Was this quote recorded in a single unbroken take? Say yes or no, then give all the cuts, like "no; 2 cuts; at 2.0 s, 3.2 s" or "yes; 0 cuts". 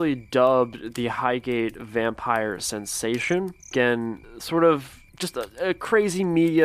no; 2 cuts; at 3.6 s, 5.1 s